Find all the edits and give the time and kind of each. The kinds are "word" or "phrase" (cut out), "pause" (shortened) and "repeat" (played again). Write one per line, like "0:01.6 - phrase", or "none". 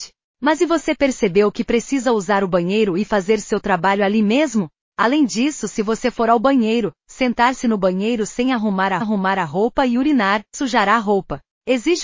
0:09.0 - repeat
0:10.5 - word